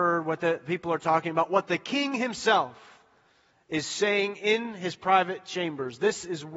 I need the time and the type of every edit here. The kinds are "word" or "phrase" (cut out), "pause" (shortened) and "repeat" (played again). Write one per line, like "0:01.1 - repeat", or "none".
none